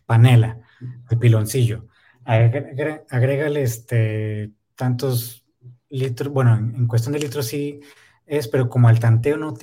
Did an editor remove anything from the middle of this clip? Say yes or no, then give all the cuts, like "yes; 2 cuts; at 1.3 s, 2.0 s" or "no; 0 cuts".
no; 0 cuts